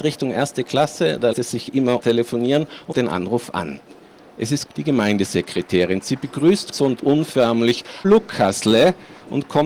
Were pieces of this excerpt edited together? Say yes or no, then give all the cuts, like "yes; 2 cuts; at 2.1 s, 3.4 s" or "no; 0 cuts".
yes; 6 cuts; at 1.3 s, 2.0 s, 2.9 s, 4.7 s, 6.7 s, 8.0 s